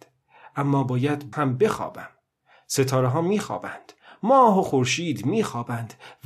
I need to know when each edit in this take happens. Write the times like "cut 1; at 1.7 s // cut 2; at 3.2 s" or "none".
cut 1; at 1.3 s